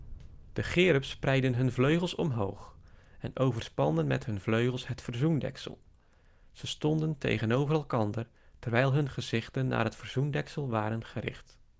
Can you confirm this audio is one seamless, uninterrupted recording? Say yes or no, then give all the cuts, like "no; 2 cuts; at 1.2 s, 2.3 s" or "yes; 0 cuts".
yes; 0 cuts